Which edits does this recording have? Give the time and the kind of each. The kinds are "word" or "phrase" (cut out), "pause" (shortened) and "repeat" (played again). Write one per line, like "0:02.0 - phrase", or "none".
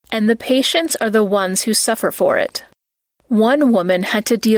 none